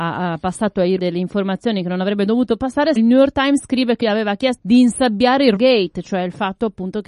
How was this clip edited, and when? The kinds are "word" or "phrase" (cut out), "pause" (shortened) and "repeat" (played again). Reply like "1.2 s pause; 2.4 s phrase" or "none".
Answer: 1.0 s word; 3.0 s word; 4.0 s word; 4.6 s word; 5.6 s word